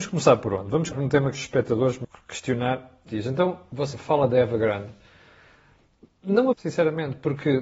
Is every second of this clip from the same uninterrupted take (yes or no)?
no